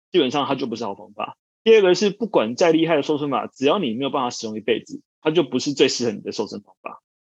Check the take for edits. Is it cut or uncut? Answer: cut